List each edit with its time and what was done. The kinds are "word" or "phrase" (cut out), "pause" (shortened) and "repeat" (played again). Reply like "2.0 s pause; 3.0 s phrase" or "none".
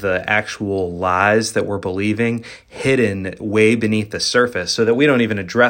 none